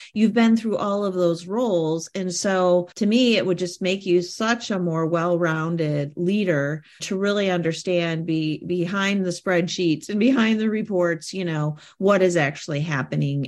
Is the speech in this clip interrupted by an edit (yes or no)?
yes